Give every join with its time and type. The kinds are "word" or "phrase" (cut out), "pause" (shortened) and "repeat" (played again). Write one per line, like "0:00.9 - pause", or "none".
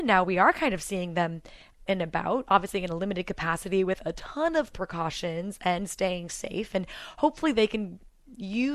0:01.9 - word